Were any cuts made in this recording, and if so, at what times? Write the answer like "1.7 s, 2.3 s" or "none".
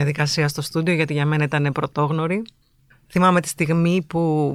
none